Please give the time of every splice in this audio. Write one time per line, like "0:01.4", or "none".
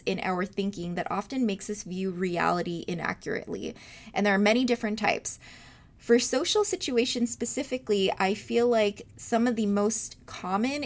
none